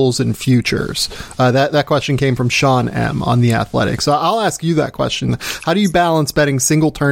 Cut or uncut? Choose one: uncut